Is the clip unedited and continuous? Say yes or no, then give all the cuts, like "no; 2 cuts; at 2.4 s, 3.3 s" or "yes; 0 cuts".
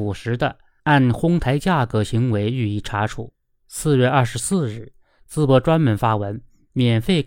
yes; 0 cuts